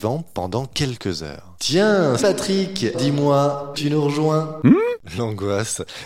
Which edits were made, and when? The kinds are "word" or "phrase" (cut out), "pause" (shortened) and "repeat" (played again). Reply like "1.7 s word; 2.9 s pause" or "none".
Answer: 2.2 s word; 2.9 s word; 3.7 s phrase